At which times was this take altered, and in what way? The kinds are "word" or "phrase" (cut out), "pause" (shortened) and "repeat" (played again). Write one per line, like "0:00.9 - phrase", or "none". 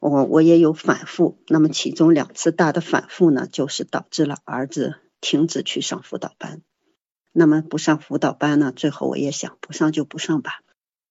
none